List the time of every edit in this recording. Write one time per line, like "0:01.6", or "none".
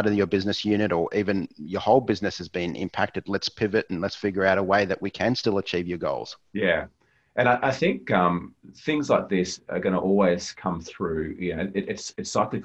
0:06.5

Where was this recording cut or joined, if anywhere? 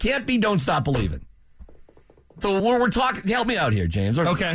0:02.4

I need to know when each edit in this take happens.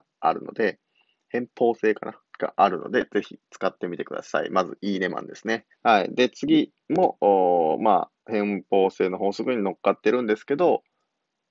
0:02.3
0:05.7
0:08.2

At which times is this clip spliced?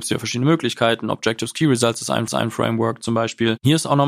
0:02.3

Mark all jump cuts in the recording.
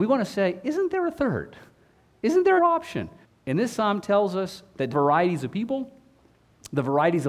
0:02.6
0:03.2
0:04.9

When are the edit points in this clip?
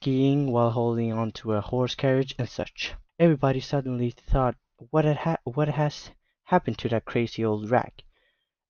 0:03.1

